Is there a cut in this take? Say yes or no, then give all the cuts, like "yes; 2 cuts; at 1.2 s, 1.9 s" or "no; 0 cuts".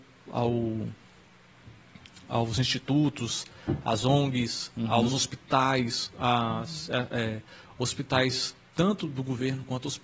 no; 0 cuts